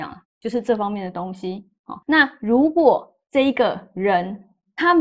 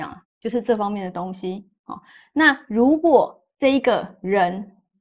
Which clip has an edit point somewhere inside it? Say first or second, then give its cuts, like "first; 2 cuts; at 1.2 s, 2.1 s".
first; 1 cut; at 2.0 s